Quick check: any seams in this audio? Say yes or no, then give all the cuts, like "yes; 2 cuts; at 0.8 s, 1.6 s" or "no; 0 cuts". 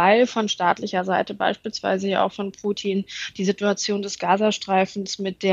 no; 0 cuts